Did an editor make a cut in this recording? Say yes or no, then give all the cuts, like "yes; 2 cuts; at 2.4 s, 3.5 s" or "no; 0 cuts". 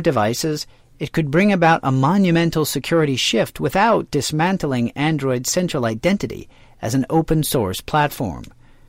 no; 0 cuts